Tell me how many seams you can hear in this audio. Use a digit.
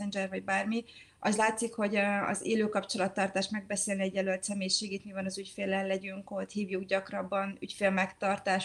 0